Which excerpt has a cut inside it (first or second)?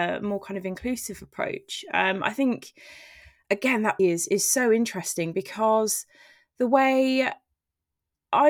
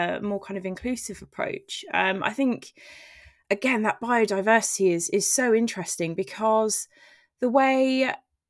first